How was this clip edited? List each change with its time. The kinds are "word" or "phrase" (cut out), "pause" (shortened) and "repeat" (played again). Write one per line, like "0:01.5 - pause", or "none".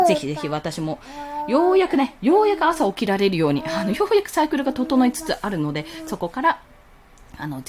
none

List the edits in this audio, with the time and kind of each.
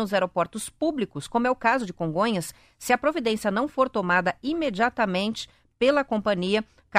none

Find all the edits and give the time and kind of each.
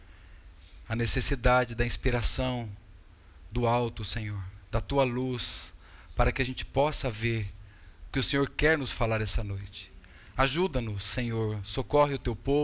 none

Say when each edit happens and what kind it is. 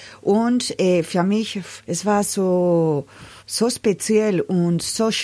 0:01.8 - pause
0:03.4 - pause

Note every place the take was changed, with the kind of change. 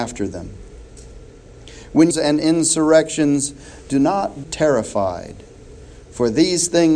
0:02.1 - phrase
0:04.4 - word

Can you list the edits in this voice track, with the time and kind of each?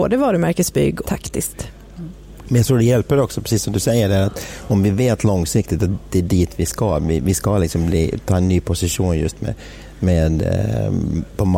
0:01.0 - phrase

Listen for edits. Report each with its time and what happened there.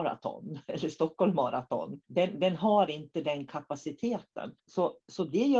0:02.0 - pause
0:04.6 - pause

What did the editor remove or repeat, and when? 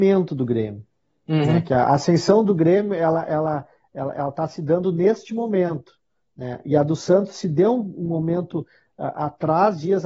none

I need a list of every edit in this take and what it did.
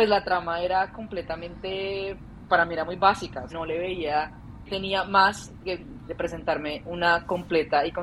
0:02.5 - word
0:03.5 - word
0:04.7 - word

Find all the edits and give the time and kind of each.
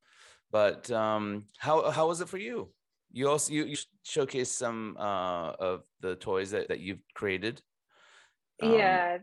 0:03.7 - word
0:06.7 - word

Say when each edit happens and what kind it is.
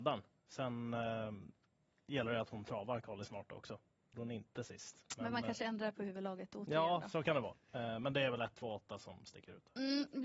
0:04.1 - word

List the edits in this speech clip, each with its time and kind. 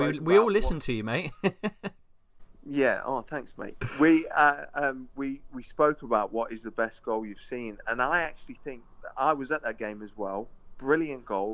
none

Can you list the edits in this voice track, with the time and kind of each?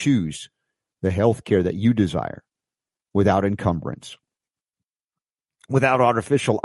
none

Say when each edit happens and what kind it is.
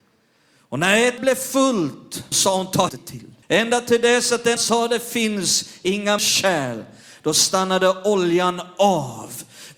0:01.2 - word
0:02.3 - word
0:02.9 - word
0:03.4 - pause
0:04.6 - phrase
0:06.2 - word

